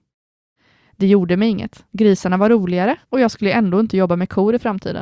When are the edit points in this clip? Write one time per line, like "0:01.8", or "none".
0:01.9
0:03.0